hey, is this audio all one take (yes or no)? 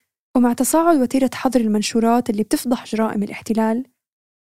yes